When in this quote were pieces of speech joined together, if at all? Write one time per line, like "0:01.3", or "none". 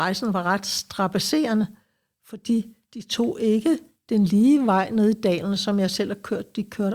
none